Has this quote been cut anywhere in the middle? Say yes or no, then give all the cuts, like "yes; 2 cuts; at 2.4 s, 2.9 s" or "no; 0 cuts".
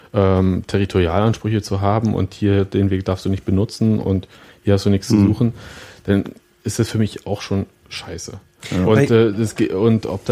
no; 0 cuts